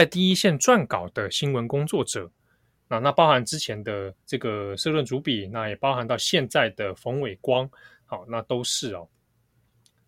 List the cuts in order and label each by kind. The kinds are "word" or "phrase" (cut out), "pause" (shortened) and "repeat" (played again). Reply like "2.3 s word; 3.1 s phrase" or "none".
4.2 s pause